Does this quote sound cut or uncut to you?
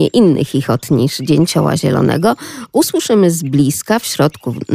uncut